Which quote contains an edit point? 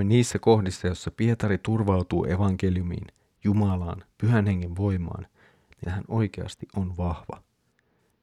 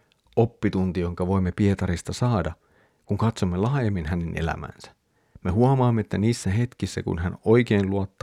first; 1 cut; at 5.8 s

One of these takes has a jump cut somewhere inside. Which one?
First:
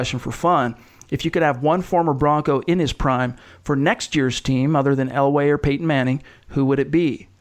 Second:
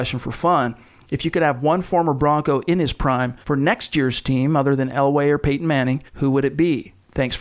second; 2 cuts; at 3.4 s, 6.1 s

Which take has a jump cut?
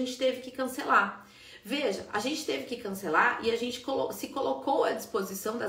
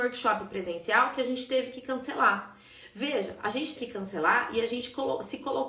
second; 1 cut; at 3.8 s

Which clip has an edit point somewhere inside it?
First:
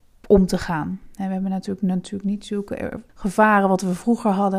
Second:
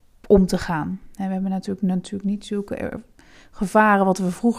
first; 1 cut; at 3.1 s

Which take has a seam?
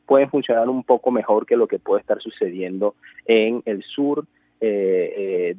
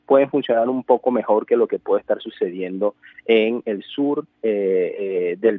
second; 1 cut; at 4.3 s

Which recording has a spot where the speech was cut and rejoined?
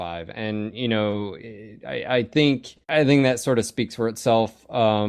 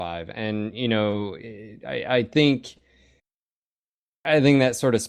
first; 1 cut; at 2.8 s

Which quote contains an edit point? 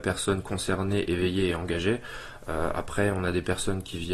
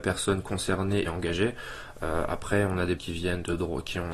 second; 2 cuts; at 1.1 s, 3.0 s

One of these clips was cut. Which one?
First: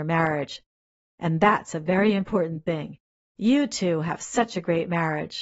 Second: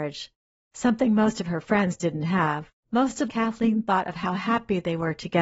second; 2 cuts; at 2.8 s, 3.3 s

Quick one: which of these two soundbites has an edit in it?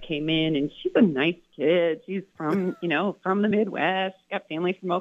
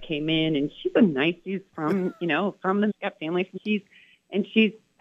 second; 3 cuts; at 1.4 s, 2.9 s, 3.6 s

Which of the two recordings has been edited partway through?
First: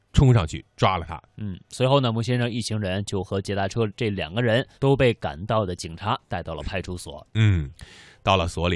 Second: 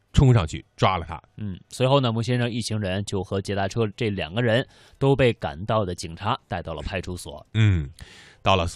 first; 1 cut; at 4.7 s

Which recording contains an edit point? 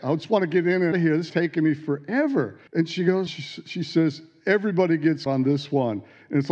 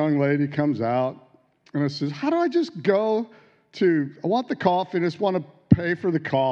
first; 5 cuts; at 0.9 s, 1.3 s, 2.7 s, 3.3 s, 5.3 s

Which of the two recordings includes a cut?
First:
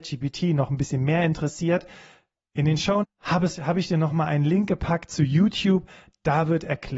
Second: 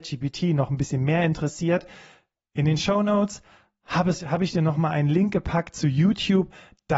first; 1 cut; at 3.0 s

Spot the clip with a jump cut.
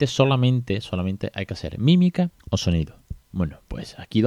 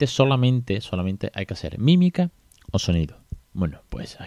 first; 1 cut; at 2.4 s

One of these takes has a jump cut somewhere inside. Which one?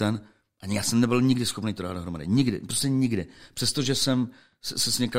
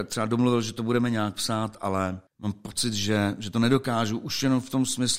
second; 1 cut; at 2.3 s

